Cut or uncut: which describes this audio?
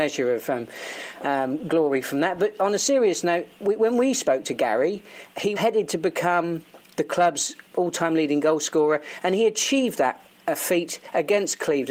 cut